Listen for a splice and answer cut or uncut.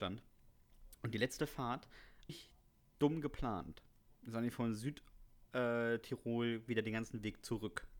cut